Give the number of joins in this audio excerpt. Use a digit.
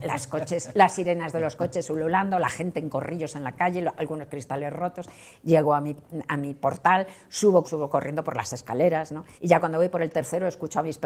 2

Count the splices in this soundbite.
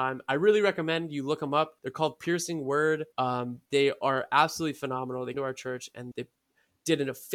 4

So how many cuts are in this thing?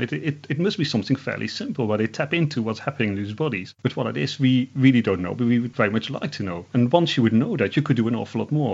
0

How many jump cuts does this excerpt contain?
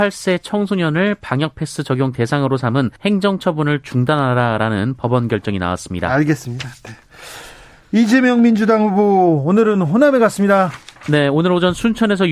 1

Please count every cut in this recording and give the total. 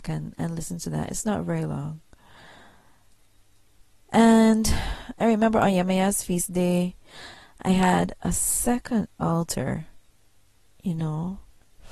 0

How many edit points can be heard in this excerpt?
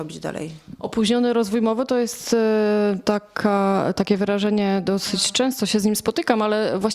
0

